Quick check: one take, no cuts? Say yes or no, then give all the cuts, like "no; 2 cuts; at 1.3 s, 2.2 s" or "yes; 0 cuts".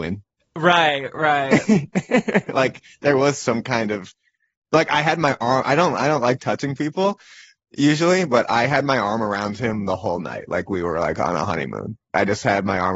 yes; 0 cuts